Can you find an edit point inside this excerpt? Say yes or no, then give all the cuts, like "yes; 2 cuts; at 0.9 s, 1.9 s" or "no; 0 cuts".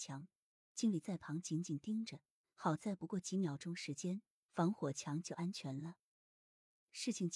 no; 0 cuts